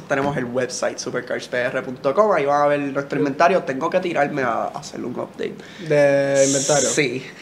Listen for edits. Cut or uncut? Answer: uncut